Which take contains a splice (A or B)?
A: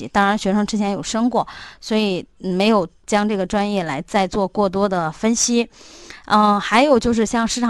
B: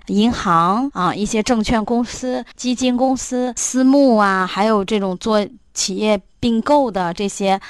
B